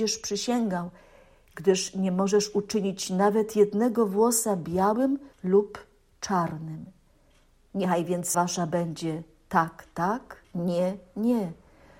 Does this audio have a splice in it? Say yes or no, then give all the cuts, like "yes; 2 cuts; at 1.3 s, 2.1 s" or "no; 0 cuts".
yes; 3 cuts; at 5.3 s, 8.3 s, 10.4 s